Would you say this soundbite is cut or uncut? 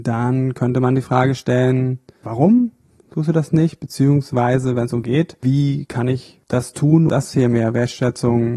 cut